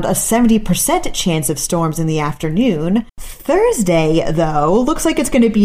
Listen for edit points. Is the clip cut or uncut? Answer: cut